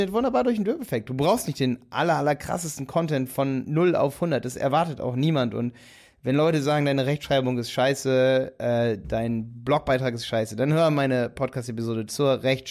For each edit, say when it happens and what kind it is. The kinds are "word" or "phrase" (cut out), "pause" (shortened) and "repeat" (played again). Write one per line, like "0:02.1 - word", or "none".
none